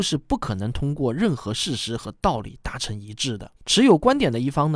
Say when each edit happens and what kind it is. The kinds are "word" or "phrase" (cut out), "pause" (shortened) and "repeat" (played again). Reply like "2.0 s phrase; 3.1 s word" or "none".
3.6 s pause